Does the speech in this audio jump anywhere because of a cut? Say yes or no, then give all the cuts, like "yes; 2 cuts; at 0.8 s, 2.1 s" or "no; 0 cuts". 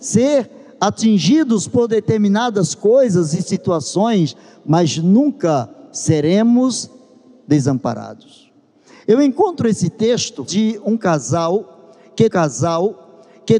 yes; 2 cuts; at 10.5 s, 12.3 s